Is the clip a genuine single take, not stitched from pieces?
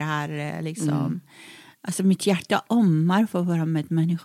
yes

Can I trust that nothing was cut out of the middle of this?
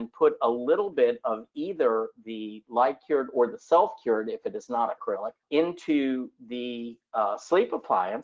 no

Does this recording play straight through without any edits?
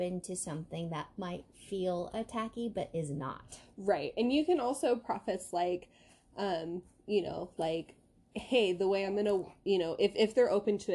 yes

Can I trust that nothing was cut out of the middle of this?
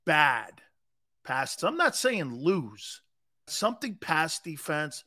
no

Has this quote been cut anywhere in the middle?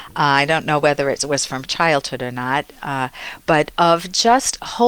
no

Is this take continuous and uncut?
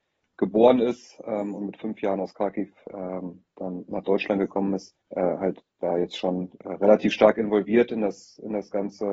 no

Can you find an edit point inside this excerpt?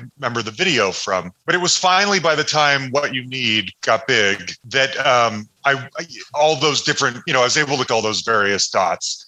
yes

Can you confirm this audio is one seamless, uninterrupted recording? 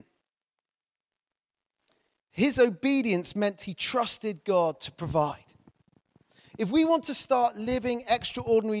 yes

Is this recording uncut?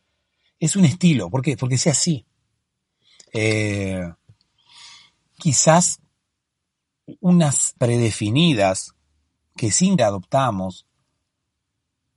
no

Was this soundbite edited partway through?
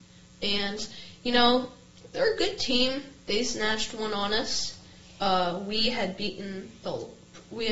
no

